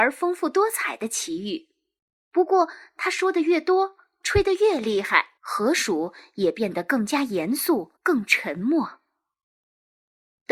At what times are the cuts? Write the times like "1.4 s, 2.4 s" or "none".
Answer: 5.4 s, 8.0 s